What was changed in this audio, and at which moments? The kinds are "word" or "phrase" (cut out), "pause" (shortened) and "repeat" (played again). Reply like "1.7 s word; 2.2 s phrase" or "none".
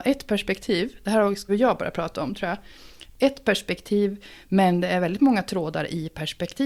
1.5 s word